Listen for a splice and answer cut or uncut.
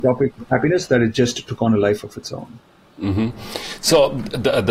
uncut